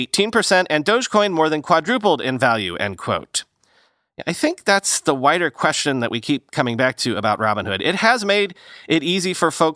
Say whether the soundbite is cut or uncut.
uncut